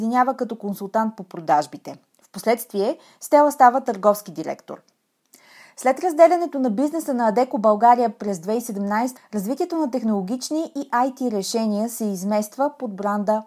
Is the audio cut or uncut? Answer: cut